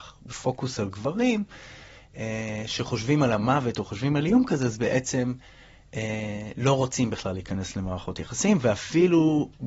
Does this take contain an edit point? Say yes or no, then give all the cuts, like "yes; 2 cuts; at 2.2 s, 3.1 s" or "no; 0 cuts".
no; 0 cuts